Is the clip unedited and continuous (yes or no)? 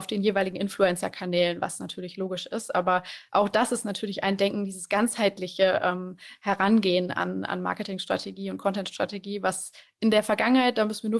yes